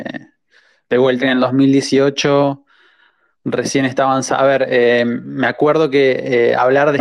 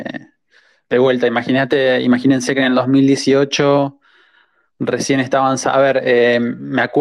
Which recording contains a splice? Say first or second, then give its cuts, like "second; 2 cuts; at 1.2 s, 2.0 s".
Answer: first; 1 cut; at 1.2 s